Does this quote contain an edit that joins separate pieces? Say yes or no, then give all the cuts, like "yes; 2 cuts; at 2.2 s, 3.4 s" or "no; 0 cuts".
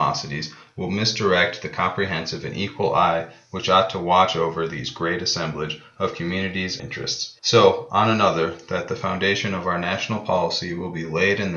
yes; 2 cuts; at 6.8 s, 7.4 s